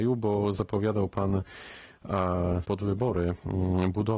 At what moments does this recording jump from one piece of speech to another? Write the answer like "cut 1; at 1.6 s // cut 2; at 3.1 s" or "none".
cut 1; at 2.6 s